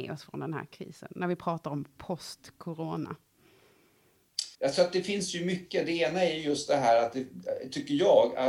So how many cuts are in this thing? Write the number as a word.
one